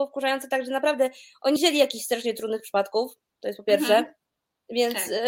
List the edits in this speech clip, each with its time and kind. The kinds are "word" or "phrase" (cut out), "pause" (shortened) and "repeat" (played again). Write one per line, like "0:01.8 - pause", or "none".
0:01.6 - word